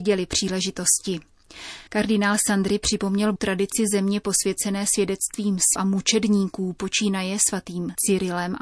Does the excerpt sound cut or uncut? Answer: cut